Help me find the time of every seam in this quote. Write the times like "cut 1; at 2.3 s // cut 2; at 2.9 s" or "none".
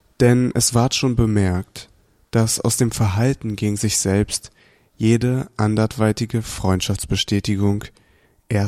none